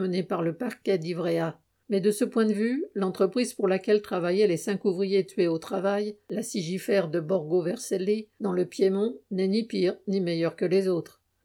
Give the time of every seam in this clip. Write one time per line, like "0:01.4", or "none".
none